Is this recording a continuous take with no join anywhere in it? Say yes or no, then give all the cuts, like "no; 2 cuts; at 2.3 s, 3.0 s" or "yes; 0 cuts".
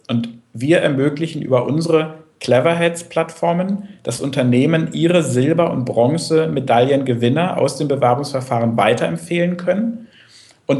yes; 0 cuts